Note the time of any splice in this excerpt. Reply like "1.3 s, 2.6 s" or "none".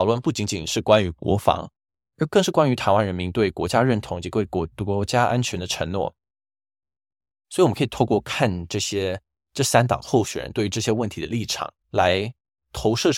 11.8 s